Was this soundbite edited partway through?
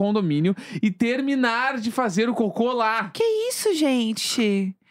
no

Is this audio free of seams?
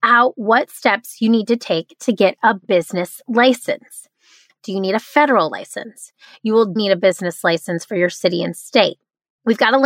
no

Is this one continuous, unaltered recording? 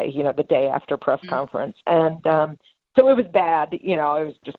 yes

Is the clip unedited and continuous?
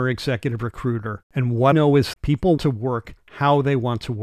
no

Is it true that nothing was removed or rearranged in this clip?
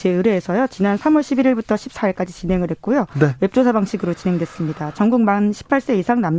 yes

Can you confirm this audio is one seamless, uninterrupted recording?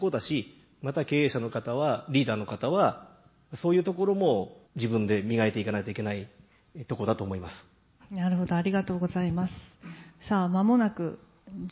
no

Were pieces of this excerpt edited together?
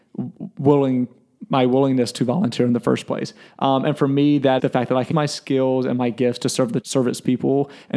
yes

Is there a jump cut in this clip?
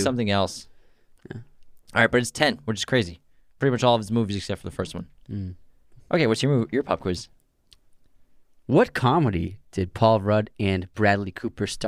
no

